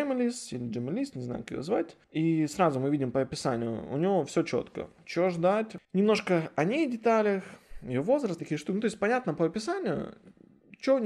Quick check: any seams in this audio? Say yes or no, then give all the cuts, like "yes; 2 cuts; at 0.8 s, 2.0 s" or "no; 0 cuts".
yes; 3 cuts; at 2.0 s, 5.8 s, 8.4 s